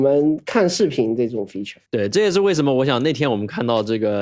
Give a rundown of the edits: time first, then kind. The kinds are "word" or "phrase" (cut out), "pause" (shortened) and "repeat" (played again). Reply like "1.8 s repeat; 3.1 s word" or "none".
1.9 s pause